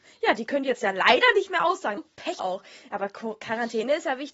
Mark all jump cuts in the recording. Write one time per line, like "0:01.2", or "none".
0:02.0
0:02.4